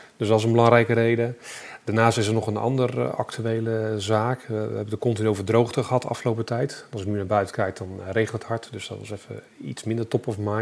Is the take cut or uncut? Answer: uncut